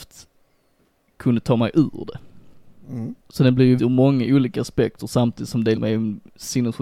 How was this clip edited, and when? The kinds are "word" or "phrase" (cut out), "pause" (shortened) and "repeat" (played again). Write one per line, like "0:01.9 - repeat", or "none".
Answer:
0:03.2 - pause
0:03.8 - word
0:05.8 - word